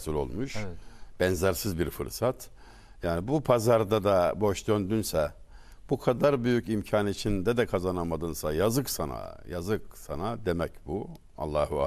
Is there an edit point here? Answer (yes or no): no